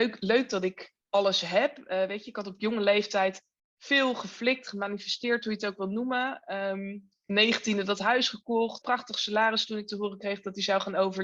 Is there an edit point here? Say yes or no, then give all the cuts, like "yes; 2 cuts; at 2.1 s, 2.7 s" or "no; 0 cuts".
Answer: yes; 3 cuts; at 1.0 s, 3.6 s, 8.8 s